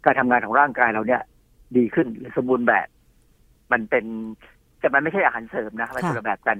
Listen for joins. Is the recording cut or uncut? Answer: uncut